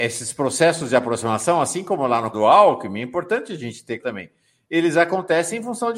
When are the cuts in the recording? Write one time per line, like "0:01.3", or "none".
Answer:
0:02.3
0:04.0